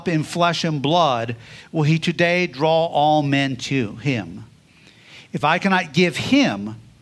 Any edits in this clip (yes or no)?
no